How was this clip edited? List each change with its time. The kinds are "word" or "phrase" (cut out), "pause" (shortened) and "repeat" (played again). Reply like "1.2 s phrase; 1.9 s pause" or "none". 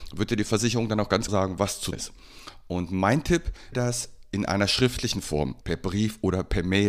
1.3 s word; 1.9 s word; 3.7 s word; 5.6 s word